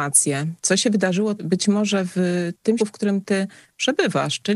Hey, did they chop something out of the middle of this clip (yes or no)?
yes